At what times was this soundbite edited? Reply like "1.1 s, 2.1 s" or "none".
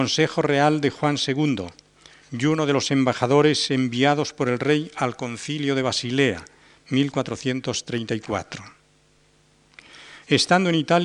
none